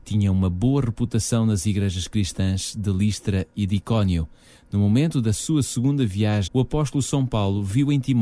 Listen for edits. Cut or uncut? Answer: cut